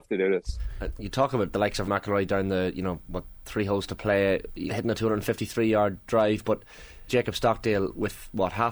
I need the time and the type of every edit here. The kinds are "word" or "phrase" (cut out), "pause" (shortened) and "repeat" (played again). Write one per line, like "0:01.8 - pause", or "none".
0:01.9 - word
0:04.7 - word
0:07.1 - word